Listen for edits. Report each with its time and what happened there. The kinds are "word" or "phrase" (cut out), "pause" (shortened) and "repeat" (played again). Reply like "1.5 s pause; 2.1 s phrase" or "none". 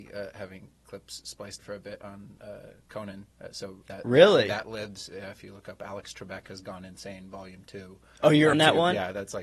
1.6 s word; 3.3 s pause; 3.8 s word; 8.5 s word